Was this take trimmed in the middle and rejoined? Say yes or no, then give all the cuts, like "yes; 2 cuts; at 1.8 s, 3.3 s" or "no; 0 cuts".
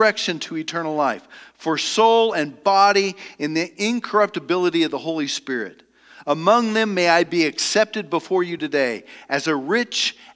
no; 0 cuts